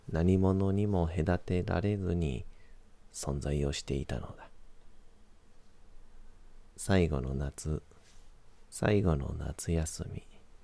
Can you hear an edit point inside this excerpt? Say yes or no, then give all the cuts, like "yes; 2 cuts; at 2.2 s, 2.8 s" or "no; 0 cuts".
yes; 2 cuts; at 6.7 s, 8.6 s